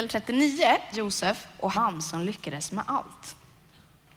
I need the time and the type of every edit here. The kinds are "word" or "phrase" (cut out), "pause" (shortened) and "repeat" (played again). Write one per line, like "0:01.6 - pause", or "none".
0:00.9 - phrase
0:01.7 - phrase